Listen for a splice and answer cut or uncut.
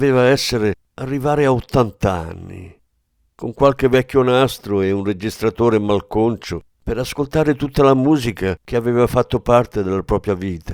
uncut